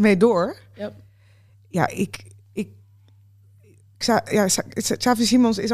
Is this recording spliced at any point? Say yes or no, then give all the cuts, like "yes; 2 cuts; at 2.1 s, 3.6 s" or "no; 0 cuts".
no; 0 cuts